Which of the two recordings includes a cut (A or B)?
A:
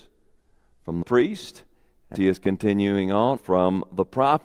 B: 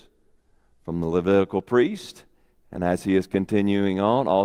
A